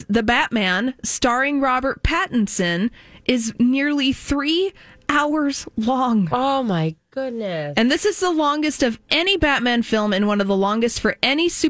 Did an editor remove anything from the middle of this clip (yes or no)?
no